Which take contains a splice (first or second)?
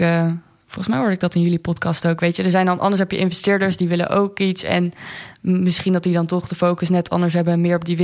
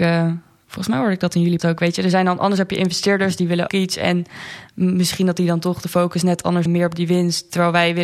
second